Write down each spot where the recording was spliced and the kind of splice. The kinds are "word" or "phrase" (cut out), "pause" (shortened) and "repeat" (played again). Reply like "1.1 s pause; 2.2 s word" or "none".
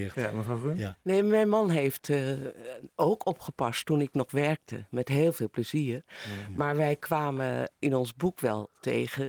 none